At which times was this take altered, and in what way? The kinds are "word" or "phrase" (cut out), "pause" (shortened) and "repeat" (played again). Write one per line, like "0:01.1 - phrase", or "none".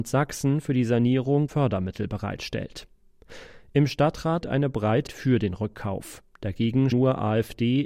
0:01.5 - word
0:04.4 - word
0:05.1 - word
0:06.9 - word